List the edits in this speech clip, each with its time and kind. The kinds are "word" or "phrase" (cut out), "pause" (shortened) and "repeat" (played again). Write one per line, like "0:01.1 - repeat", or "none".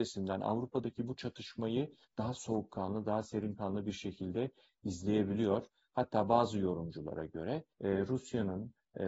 0:07.7 - pause